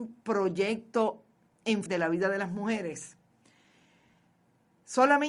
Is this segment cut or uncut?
cut